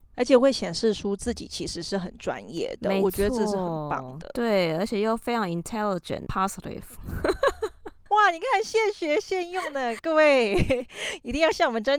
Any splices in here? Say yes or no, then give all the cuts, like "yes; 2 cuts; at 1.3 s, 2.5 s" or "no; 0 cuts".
yes; 1 cut; at 6.3 s